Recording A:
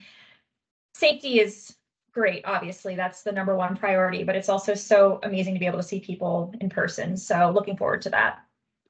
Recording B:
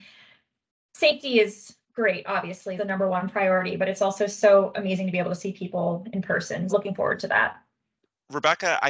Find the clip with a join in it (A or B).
B